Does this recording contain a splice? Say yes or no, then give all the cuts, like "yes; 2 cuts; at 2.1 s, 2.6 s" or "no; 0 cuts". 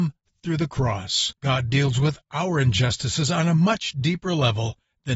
yes; 1 cut; at 1.4 s